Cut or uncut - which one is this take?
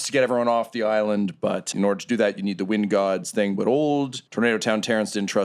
cut